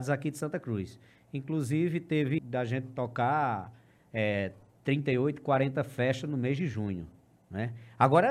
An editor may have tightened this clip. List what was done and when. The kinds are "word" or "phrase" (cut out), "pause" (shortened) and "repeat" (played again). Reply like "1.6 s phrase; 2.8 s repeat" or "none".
2.4 s word

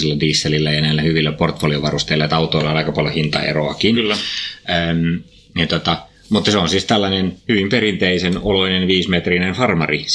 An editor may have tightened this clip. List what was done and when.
none

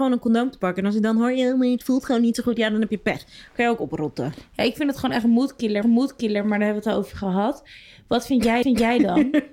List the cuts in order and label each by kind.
5.8 s repeat; 8.6 s repeat

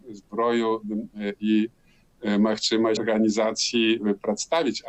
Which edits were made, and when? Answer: 3.0 s word

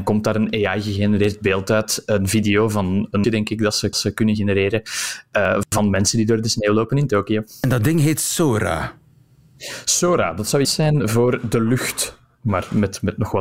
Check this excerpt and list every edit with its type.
3.2 s word; 3.9 s repeat; 10.6 s word

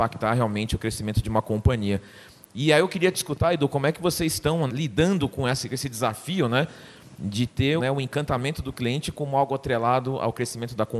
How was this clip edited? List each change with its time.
4.7 s word; 7.8 s word

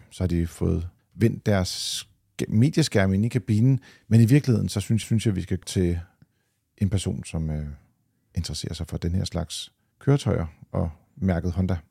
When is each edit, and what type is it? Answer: 1.0 s pause; 5.0 s repeat; 5.6 s word

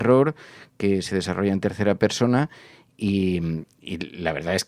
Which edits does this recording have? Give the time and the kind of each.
none

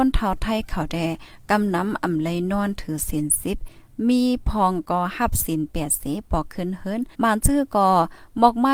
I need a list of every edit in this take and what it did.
7.1 s pause

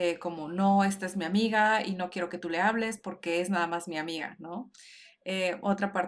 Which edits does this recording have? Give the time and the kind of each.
none

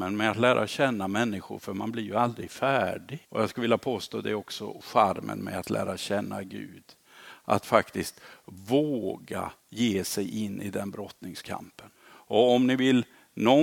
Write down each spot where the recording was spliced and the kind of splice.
3.2 s pause; 9.6 s pause; 12.0 s pause

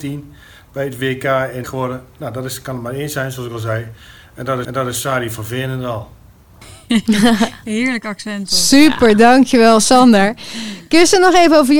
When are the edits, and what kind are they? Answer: 1.6 s phrase; 4.6 s repeat; 6.3 s pause

